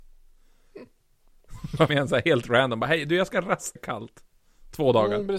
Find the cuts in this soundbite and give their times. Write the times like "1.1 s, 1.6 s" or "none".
1.9 s, 3.8 s